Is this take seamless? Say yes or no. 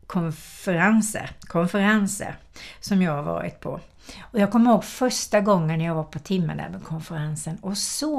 yes